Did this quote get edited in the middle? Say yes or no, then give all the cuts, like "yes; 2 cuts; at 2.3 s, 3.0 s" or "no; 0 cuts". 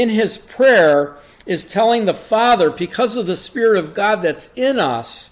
no; 0 cuts